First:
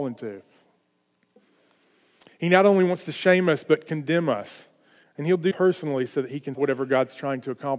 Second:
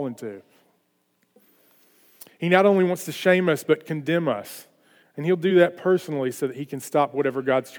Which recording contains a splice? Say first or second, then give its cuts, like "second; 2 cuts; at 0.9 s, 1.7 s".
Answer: first; 2 cuts; at 5.5 s, 6.5 s